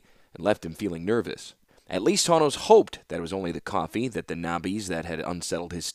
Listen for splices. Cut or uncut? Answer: cut